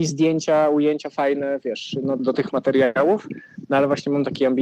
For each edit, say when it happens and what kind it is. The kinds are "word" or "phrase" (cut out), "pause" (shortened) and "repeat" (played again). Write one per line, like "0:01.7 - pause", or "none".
0:02.2 - word